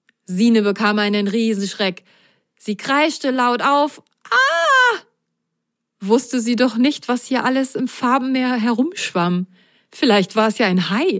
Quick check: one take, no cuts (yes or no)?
yes